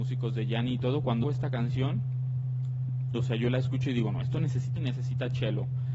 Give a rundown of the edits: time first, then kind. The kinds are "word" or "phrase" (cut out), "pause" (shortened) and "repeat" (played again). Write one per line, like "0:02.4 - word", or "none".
0:01.2 - word
0:04.8 - word